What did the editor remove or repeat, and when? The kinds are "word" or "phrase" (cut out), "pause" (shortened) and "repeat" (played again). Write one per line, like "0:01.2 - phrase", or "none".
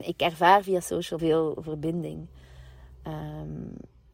0:01.2 - phrase